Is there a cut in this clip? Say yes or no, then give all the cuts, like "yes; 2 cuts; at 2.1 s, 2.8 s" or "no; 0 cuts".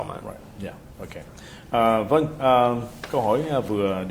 no; 0 cuts